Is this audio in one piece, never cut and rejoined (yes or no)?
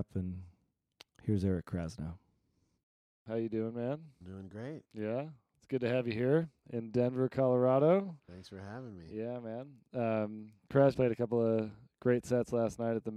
no